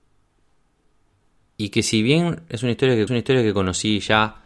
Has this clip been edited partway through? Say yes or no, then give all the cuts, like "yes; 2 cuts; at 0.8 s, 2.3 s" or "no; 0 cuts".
yes; 1 cut; at 3.1 s